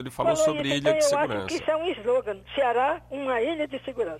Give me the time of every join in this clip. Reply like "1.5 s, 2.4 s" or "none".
2.4 s